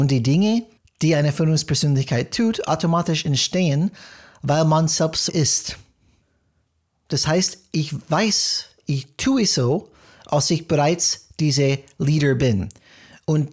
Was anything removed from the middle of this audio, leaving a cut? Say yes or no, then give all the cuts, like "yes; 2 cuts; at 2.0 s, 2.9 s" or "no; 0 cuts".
yes; 1 cut; at 5.3 s